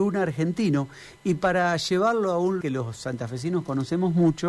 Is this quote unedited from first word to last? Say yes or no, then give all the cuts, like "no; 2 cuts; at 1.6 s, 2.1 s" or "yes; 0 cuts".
no; 1 cut; at 2.6 s